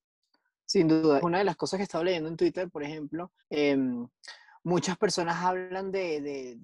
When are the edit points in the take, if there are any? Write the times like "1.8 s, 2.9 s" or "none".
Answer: 1.2 s, 3.4 s